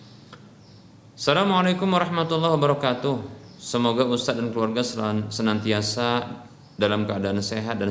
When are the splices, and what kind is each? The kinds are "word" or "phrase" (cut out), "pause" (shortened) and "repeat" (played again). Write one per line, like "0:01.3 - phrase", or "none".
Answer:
none